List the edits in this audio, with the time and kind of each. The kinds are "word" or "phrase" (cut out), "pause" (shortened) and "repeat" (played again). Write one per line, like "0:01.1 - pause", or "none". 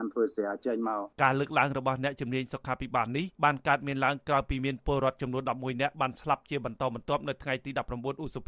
0:01.1 - pause
0:03.3 - pause